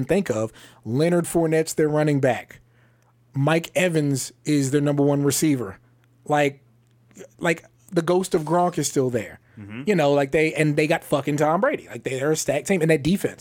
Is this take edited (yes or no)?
no